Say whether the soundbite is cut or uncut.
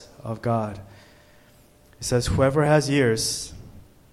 uncut